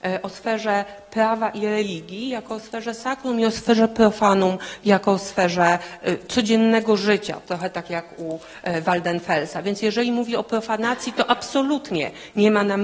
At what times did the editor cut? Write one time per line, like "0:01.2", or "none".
none

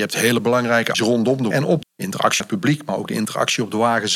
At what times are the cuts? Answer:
0:00.9
0:01.5
0:01.8
0:02.4

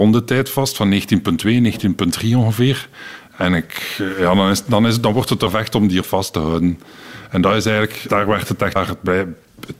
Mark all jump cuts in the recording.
0:05.5
0:06.0
0:08.1
0:08.8

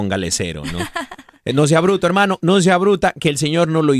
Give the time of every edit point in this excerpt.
none

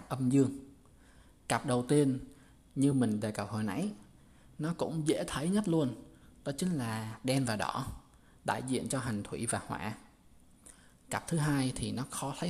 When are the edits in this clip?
none

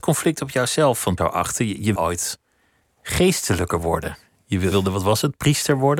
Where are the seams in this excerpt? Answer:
0:01.2
0:02.0
0:04.7

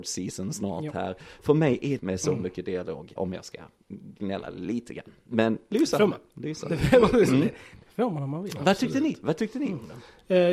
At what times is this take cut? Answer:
0:02.0
0:03.2

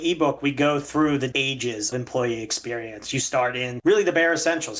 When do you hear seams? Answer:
0:01.3
0:01.9

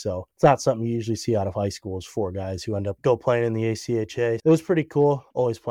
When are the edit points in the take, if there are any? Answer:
0:04.4

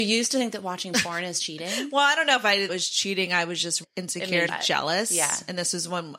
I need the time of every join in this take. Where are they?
0:02.7
0:03.8
0:04.5

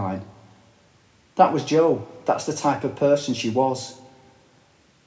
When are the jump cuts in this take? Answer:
none

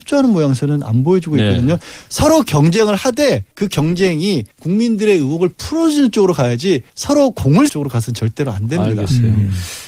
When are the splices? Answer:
0:03.5
0:04.5
0:06.9
0:07.7

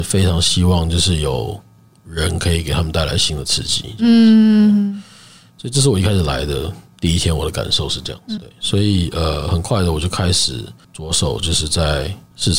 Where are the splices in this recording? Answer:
0:08.4

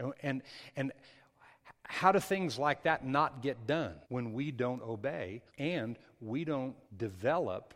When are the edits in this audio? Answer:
0:04.0
0:05.5
0:06.8

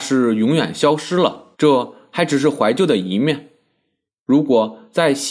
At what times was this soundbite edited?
0:01.5

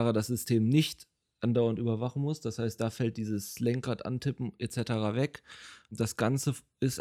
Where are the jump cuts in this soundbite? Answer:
none

